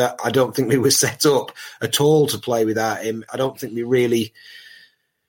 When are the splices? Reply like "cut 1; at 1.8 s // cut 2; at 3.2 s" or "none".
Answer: cut 1; at 3.3 s